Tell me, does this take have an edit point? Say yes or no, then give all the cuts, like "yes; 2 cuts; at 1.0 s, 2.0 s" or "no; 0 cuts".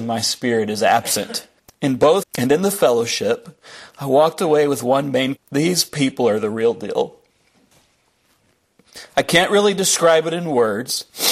yes; 3 cuts; at 1.6 s, 2.2 s, 5.3 s